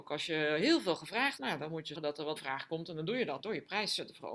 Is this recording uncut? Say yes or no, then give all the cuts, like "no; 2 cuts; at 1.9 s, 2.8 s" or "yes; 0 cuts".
no; 4 cuts; at 1.4 s, 1.9 s, 2.4 s, 3.4 s